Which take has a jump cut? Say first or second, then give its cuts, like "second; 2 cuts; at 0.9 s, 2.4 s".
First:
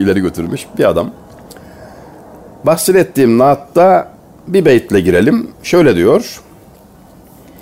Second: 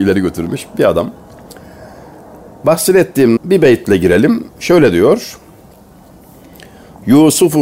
second; 1 cut; at 3.4 s